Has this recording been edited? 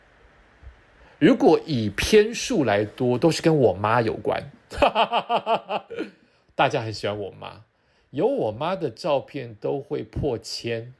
no; 0 cuts

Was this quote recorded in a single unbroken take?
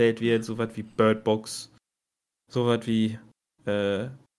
yes; 0 cuts

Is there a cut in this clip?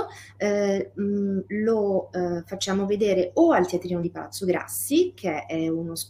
no; 0 cuts

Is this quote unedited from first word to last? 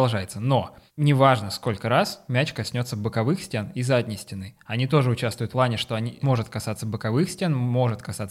no; 2 cuts; at 5.5 s, 6.2 s

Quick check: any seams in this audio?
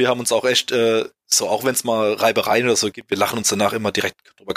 no; 0 cuts

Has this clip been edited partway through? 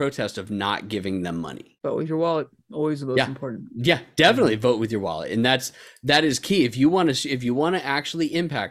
no; 0 cuts

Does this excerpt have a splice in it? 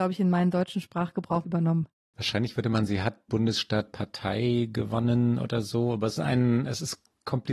yes; 5 cuts; at 1.4 s, 2.9 s, 3.3 s, 3.9 s, 6.2 s

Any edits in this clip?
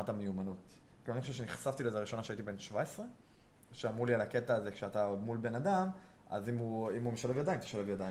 no; 0 cuts

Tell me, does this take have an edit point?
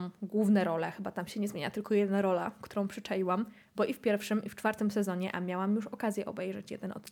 no; 0 cuts

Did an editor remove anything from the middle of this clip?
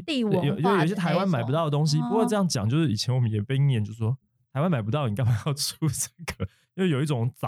no; 0 cuts

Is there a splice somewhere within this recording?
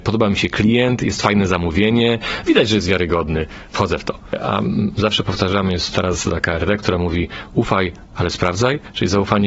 no; 0 cuts

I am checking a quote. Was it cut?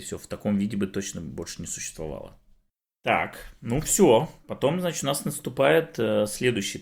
no; 0 cuts

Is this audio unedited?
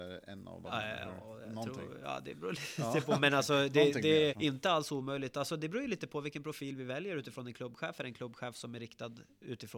no; 1 cut; at 4.3 s

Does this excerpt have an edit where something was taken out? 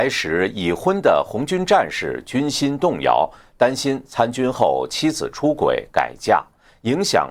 no; 0 cuts

